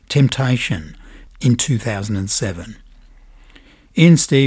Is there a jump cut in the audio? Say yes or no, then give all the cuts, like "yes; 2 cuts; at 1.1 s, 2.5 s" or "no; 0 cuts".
no; 0 cuts